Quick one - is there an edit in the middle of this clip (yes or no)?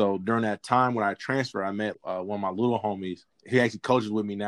yes